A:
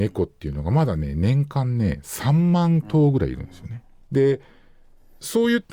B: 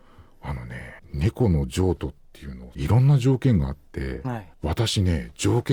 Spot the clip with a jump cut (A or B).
B